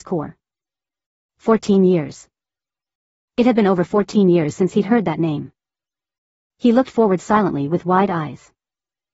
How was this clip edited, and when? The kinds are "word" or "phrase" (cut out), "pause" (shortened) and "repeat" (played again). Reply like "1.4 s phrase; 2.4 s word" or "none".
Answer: none